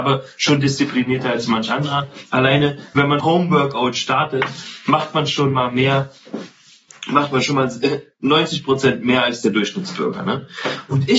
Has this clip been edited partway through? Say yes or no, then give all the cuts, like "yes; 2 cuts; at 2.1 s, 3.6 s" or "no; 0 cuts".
yes; 1 cut; at 3.2 s